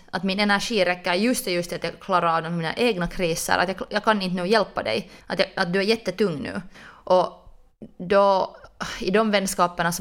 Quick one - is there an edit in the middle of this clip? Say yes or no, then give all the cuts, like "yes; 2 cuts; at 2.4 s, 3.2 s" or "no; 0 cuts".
yes; 2 cuts; at 5.2 s, 6.7 s